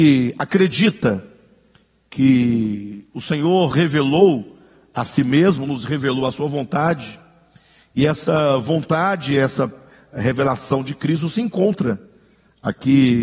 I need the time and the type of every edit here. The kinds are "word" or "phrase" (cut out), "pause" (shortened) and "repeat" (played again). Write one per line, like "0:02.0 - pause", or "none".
0:03.7 - word